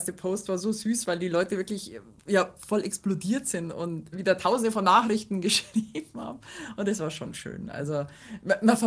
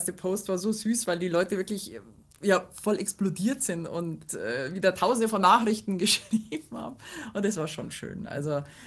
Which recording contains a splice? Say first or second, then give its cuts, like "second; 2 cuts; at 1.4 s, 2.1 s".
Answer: first; 2 cuts; at 2.2 s, 4.1 s